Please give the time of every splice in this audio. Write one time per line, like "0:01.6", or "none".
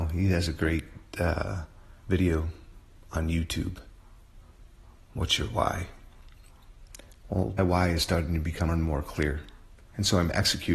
0:02.0
0:07.6
0:08.7